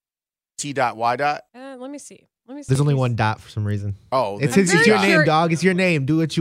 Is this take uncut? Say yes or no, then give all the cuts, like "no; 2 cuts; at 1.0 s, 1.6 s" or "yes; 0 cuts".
no; 1 cut; at 1.5 s